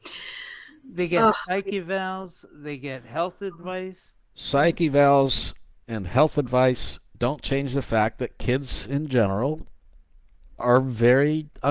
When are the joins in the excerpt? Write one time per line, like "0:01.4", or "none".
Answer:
none

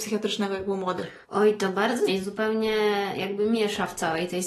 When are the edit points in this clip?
0:01.2
0:02.1

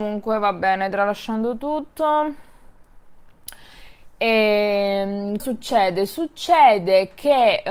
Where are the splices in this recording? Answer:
0:05.4

